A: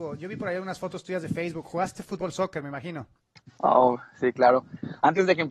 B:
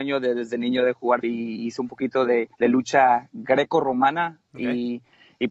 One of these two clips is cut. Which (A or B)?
B